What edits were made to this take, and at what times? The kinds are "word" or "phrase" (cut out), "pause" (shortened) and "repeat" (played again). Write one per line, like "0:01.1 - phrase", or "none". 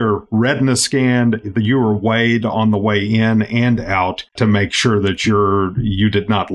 0:04.3 - pause